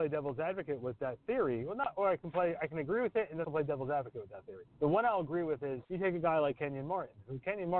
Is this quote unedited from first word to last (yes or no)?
no